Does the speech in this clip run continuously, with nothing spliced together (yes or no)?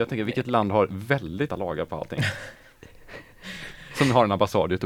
no